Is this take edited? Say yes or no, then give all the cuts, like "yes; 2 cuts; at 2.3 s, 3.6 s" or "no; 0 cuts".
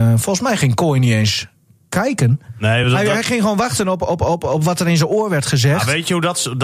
no; 0 cuts